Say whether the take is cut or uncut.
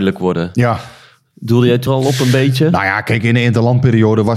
cut